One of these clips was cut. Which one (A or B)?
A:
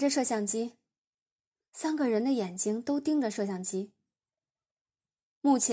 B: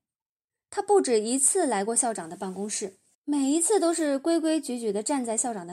B